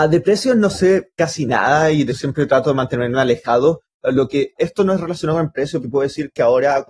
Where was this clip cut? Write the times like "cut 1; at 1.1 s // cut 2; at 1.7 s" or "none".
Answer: cut 1; at 2.1 s // cut 2; at 4.6 s // cut 3; at 5.8 s

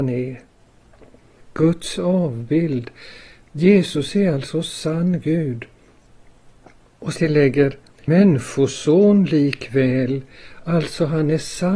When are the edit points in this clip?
cut 1; at 2.0 s // cut 2; at 7.2 s // cut 3; at 8.1 s

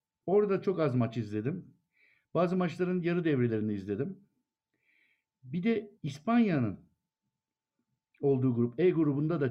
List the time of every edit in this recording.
cut 1; at 6.0 s

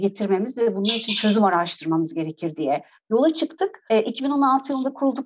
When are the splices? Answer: cut 1; at 3.9 s

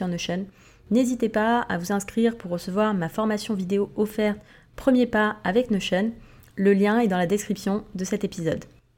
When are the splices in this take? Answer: none

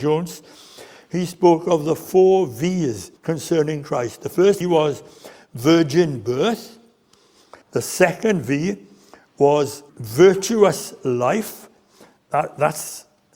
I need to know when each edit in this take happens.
cut 1; at 3.2 s // cut 2; at 4.6 s // cut 3; at 7.6 s // cut 4; at 9.9 s

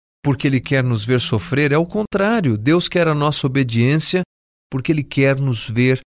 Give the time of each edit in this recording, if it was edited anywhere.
none

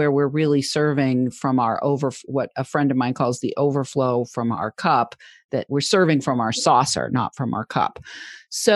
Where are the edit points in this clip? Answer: none

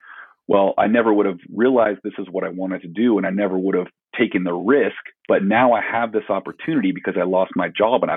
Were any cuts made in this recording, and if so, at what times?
cut 1; at 5.2 s

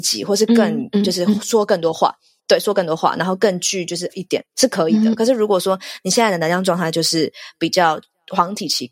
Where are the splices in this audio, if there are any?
cut 1; at 2.4 s // cut 2; at 4.1 s // cut 3; at 4.5 s

